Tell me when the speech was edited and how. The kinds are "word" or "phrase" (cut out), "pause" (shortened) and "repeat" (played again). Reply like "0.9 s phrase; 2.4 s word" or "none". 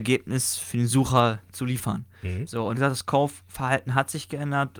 2.7 s phrase